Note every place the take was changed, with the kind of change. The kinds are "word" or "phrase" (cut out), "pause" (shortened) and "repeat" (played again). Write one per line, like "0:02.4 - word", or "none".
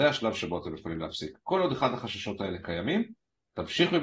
none

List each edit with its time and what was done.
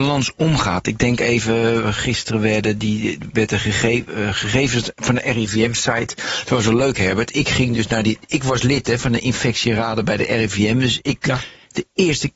none

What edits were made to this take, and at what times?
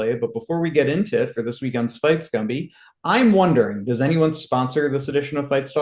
none

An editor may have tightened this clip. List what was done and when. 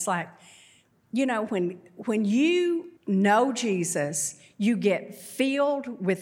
0:03.0 - pause

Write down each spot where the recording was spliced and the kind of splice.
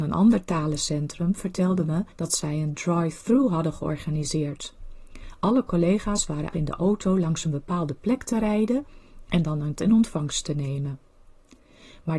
0:02.1 - pause
0:06.5 - phrase
0:09.8 - word

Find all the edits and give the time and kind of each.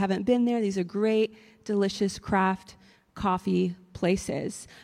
none

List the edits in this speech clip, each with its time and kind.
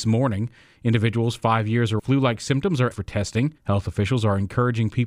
0:02.0 - phrase
0:02.9 - word
0:03.6 - pause

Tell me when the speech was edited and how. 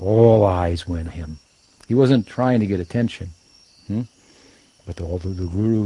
0:01.1 - word

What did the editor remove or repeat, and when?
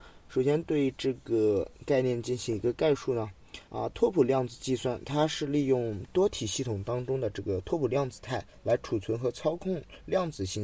0:03.7 - pause

